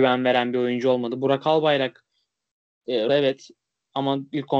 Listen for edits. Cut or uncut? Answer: cut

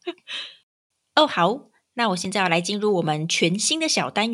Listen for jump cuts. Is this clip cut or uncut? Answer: uncut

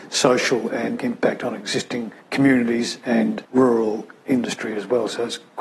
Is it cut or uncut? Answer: cut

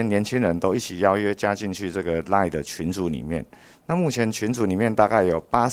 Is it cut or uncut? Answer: uncut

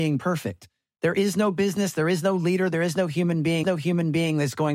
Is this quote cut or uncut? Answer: cut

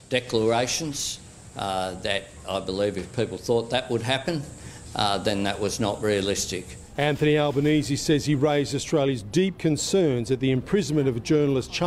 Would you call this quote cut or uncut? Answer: uncut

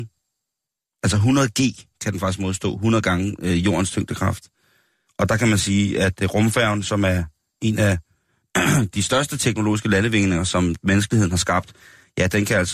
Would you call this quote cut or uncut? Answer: uncut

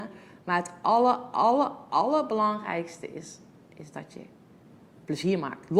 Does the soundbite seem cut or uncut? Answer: uncut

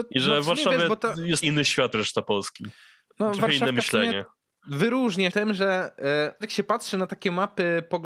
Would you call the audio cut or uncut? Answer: cut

